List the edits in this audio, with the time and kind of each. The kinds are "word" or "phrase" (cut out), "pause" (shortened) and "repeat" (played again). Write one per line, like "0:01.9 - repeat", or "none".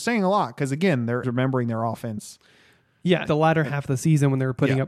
0:01.2 - word
0:03.3 - word